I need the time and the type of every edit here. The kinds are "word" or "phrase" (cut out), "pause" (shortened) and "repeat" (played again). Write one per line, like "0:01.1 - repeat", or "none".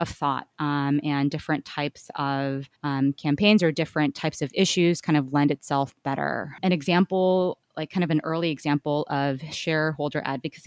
0:02.8 - pause